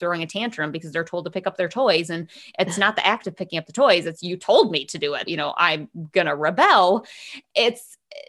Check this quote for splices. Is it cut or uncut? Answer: cut